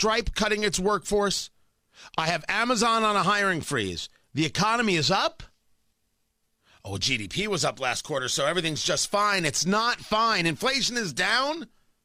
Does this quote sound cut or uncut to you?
uncut